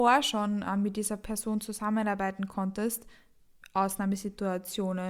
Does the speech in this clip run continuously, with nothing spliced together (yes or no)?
yes